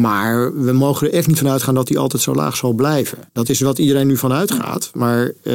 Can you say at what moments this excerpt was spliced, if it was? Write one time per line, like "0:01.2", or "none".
0:03.3